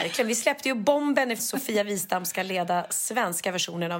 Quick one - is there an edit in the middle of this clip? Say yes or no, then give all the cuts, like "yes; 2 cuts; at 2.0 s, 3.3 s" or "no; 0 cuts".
yes; 1 cut; at 1.4 s